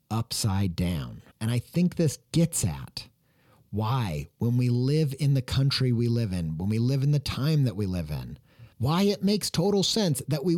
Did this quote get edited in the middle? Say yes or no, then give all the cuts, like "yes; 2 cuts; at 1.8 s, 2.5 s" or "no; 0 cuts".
yes; 2 cuts; at 1.3 s, 8.7 s